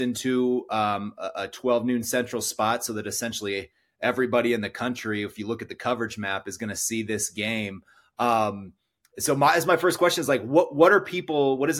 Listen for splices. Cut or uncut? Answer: uncut